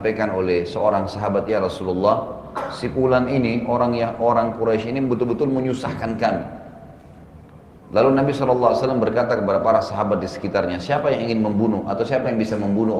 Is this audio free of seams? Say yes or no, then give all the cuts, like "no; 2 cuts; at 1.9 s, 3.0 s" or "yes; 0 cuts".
yes; 0 cuts